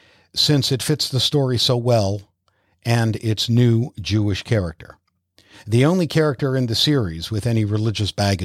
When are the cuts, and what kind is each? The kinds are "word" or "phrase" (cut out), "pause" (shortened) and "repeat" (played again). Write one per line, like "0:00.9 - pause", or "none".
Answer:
none